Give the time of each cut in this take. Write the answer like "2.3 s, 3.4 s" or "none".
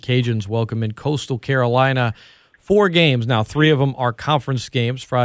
none